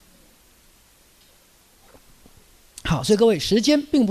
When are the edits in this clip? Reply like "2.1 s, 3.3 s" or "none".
none